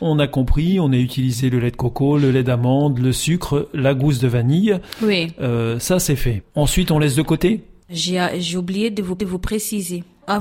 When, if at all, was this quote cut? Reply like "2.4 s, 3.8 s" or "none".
6.5 s, 9.2 s